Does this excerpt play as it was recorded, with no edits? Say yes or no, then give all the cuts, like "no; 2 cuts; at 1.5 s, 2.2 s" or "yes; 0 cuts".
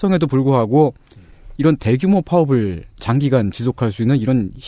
yes; 0 cuts